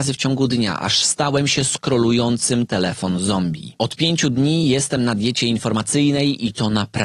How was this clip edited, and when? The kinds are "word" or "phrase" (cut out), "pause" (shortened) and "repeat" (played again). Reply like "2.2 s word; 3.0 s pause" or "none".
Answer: none